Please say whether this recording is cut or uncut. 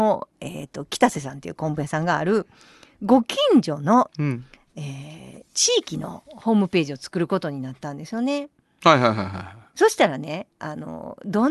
uncut